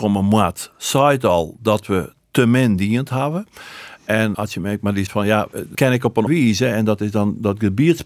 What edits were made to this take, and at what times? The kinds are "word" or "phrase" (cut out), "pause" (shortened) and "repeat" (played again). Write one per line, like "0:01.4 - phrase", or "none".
0:04.3 - word
0:05.1 - word
0:05.7 - word
0:06.3 - word